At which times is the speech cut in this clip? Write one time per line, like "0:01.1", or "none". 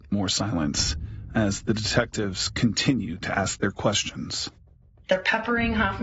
none